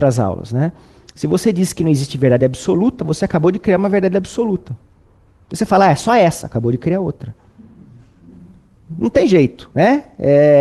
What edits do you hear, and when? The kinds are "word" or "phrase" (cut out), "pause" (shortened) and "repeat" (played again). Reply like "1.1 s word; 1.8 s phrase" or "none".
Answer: none